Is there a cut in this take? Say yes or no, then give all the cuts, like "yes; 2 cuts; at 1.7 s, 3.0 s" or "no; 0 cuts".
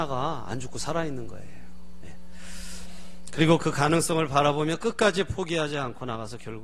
no; 0 cuts